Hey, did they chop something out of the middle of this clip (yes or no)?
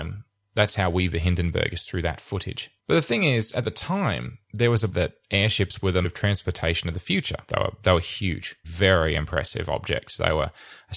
yes